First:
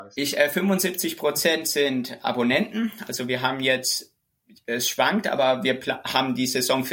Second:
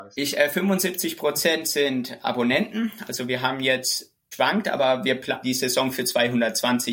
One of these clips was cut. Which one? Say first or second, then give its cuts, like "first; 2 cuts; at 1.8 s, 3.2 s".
second; 2 cuts; at 4.3 s, 5.4 s